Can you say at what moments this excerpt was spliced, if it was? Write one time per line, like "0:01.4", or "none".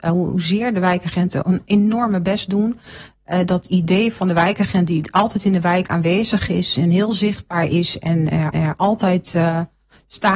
0:01.4
0:08.5